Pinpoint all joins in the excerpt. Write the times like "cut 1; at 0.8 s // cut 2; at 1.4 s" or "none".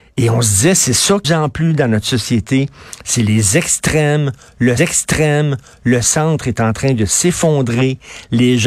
cut 1; at 1.2 s // cut 2; at 4.8 s